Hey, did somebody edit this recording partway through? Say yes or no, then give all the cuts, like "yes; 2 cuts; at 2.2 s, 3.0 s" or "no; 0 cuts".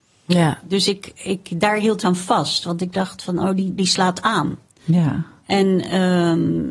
yes; 3 cuts; at 1.2 s, 2.0 s, 3.8 s